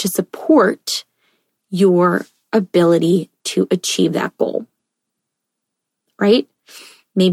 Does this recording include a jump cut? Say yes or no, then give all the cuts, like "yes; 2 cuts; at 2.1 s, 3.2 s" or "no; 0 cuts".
no; 0 cuts